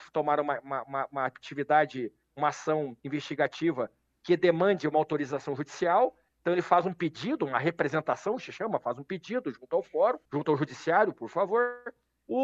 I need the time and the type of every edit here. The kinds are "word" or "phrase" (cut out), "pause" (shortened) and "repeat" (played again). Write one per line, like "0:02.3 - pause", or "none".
0:10.3 - pause